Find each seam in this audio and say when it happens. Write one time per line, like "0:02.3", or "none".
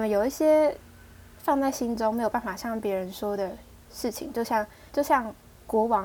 0:04.9